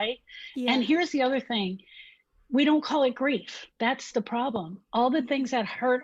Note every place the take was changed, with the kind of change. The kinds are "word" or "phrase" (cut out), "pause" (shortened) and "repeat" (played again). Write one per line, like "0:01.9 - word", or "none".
0:03.7 - pause